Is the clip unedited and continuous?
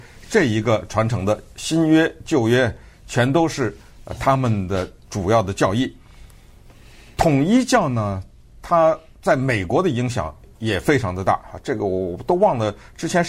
yes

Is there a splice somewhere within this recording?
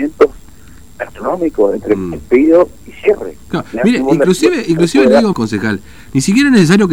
yes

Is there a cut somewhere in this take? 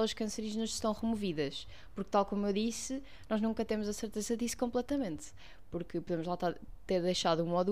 no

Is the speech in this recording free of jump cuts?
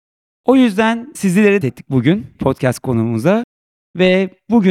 no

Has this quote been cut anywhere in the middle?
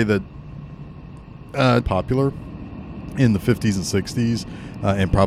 yes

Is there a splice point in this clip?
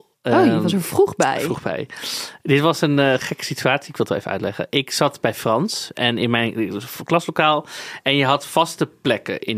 no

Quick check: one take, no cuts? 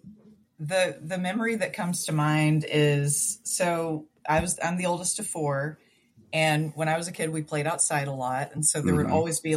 yes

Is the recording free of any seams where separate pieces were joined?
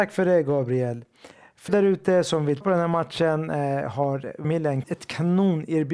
no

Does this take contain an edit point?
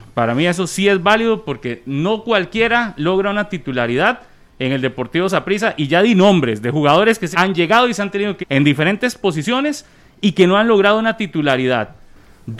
yes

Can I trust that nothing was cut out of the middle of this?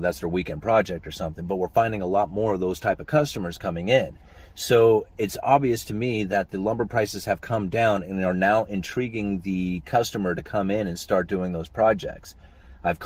yes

